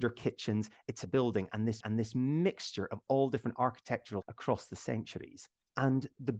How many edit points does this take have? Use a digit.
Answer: 3